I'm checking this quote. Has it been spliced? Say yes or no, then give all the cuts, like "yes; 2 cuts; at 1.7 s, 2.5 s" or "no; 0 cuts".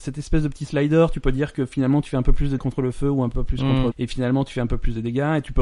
yes; 2 cuts; at 2.6 s, 3.9 s